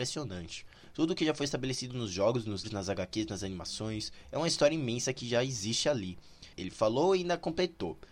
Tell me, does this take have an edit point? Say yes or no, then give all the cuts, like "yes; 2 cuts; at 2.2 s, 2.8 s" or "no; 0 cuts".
yes; 2 cuts; at 2.6 s, 6.5 s